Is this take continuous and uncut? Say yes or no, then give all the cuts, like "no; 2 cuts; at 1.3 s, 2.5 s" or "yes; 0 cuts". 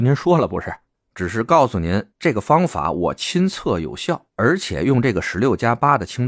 no; 2 cuts; at 2.1 s, 4.3 s